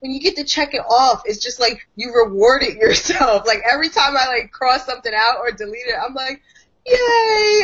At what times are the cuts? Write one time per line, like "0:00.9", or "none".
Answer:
0:01.9